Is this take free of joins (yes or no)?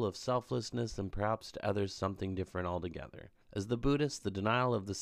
no